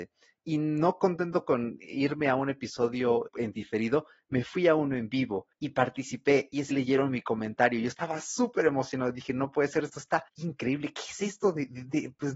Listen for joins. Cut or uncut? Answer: cut